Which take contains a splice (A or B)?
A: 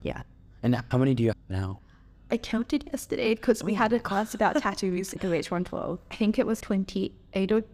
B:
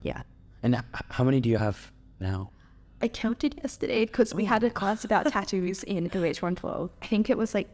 A